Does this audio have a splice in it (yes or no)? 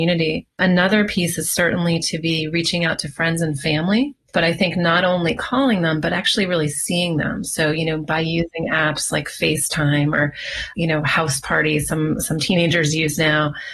no